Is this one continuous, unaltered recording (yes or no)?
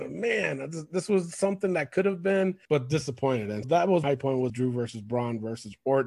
no